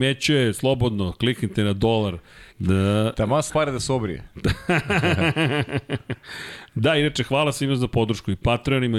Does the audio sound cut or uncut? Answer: cut